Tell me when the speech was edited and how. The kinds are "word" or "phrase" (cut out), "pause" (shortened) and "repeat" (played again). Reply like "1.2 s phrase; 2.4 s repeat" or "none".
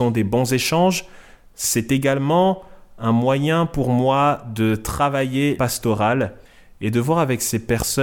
5.6 s phrase